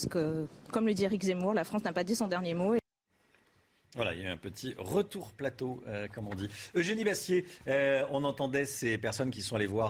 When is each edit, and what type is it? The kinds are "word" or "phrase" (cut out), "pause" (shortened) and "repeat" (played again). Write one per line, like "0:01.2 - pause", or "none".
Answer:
none